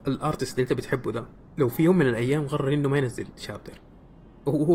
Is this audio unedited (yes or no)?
yes